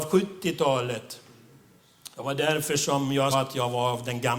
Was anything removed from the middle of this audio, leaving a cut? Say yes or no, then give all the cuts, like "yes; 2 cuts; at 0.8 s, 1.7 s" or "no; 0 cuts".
yes; 2 cuts; at 2.1 s, 3.3 s